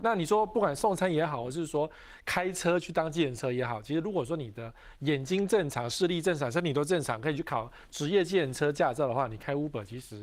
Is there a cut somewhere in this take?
no; 0 cuts

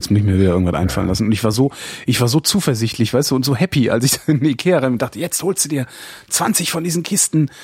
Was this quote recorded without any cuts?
yes; 0 cuts

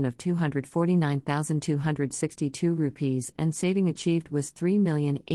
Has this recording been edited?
no; 0 cuts

